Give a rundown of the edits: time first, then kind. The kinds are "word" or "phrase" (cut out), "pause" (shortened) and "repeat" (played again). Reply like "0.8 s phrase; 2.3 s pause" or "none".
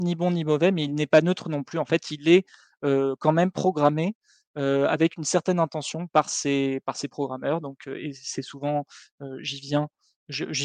none